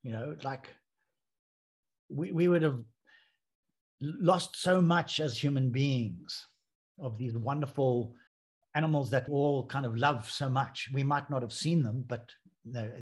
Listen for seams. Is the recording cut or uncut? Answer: cut